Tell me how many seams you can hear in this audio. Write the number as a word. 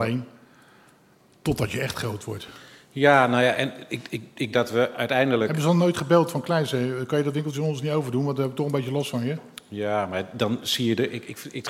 one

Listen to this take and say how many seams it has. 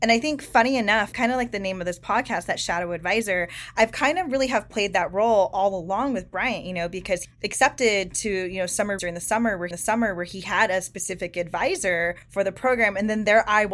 five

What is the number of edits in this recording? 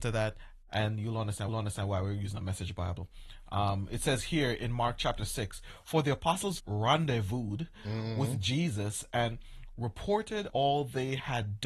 three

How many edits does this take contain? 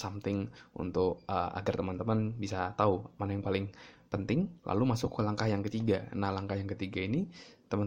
one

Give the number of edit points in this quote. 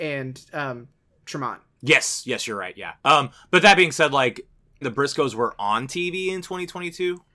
two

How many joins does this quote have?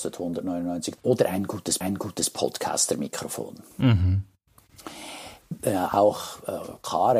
two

